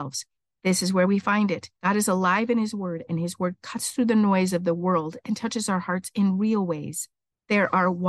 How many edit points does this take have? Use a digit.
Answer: 1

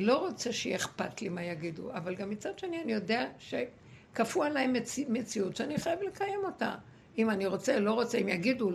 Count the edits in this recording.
0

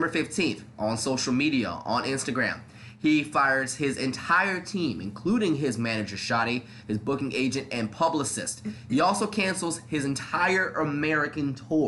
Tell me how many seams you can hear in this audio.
0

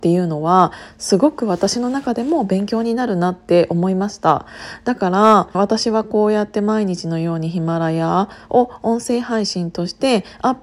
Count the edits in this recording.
1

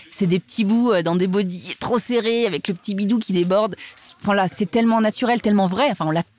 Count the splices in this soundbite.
1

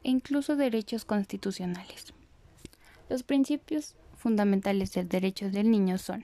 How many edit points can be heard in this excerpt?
0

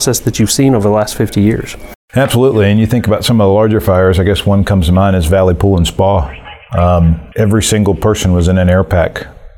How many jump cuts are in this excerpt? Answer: 1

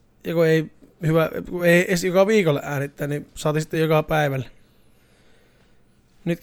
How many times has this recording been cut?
0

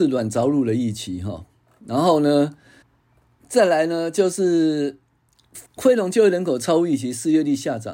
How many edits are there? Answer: 2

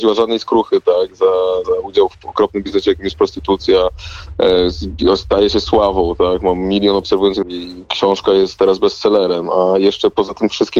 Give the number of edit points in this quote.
2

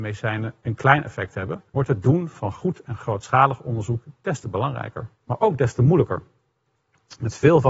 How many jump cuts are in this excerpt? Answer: 2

